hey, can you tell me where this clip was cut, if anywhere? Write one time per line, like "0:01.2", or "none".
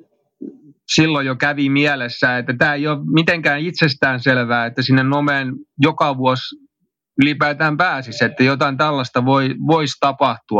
none